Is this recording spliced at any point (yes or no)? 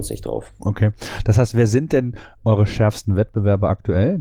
no